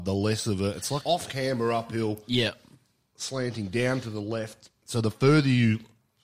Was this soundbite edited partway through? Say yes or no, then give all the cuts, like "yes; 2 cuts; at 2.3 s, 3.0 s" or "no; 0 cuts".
yes; 1 cut; at 1.0 s